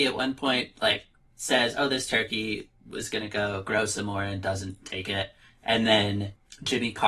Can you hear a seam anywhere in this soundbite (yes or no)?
no